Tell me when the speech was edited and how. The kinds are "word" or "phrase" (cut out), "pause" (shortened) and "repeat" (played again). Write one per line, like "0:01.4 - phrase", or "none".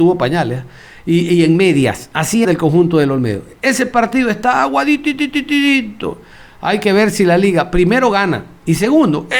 0:02.4 - word